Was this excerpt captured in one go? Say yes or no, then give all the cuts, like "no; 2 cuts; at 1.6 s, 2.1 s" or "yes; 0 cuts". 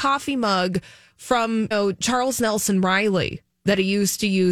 no; 1 cut; at 1.7 s